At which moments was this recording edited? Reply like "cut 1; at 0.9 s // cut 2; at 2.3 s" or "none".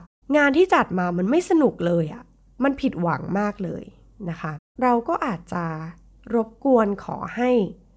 none